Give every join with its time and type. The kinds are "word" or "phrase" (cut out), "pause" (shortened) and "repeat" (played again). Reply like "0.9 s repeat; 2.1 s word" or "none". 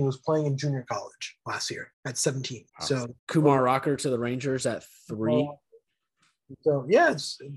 1.9 s pause; 2.7 s pause; 3.2 s pause